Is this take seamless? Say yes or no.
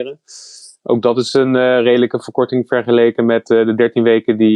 yes